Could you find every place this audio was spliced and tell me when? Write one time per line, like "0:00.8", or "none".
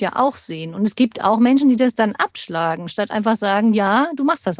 none